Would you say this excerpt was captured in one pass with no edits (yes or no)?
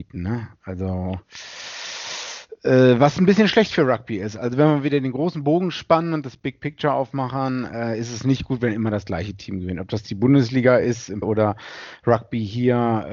no